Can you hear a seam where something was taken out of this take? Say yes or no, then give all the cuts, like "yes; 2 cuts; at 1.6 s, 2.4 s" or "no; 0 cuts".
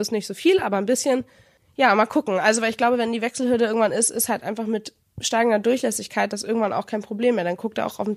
no; 0 cuts